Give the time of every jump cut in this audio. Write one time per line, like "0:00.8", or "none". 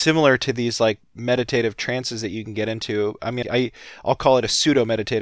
0:01.0
0:03.4

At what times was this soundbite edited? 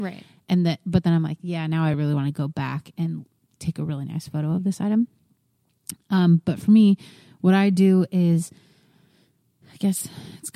none

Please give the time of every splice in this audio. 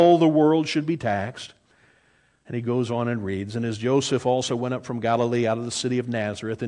none

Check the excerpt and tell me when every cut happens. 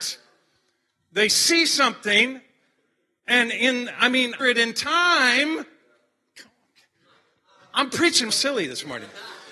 0:04.4
0:08.3

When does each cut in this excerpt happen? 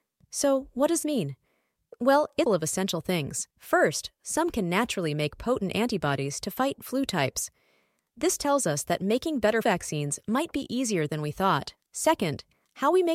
0:01.0
0:02.5
0:03.5
0:06.8
0:09.6
0:11.8

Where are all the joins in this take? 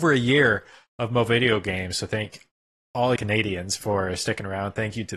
0:03.2

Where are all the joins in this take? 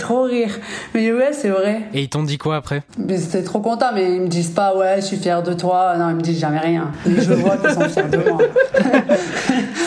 0:02.9

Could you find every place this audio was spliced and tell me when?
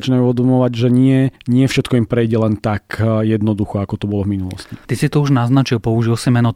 0:01.4
0:04.8

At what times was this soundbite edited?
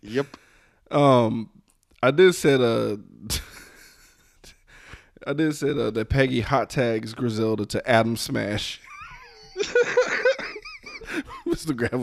none

